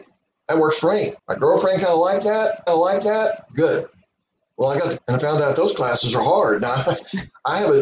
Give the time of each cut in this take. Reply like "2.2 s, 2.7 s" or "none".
1.2 s, 2.7 s, 5.0 s